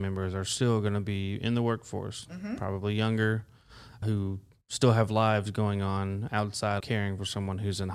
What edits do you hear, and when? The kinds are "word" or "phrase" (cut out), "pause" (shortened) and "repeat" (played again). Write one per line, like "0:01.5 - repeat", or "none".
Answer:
0:04.0 - word
0:06.8 - word